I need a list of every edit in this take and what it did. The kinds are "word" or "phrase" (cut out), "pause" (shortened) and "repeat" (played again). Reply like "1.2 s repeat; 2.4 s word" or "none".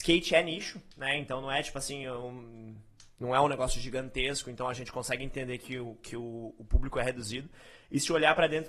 none